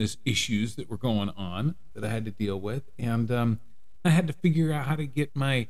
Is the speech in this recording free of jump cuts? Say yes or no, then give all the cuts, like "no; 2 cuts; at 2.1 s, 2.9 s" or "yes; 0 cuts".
no; 1 cut; at 4.0 s